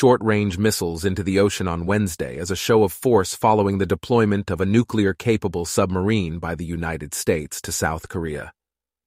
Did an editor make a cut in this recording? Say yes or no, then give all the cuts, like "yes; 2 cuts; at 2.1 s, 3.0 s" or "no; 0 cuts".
no; 0 cuts